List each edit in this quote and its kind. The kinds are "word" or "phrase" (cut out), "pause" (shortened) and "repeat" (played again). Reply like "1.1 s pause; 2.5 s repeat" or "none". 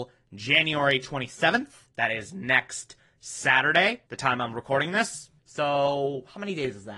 1.9 s pause; 4.1 s pause; 5.4 s pause